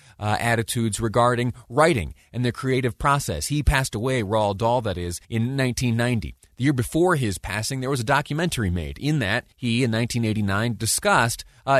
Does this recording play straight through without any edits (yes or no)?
no